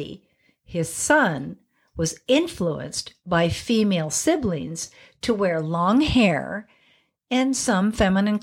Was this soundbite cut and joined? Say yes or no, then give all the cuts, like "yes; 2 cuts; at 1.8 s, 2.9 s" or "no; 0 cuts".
no; 0 cuts